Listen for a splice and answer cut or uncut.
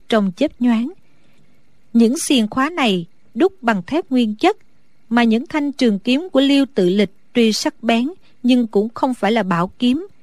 uncut